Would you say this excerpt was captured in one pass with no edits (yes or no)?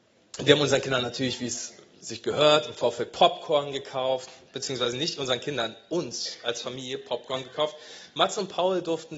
yes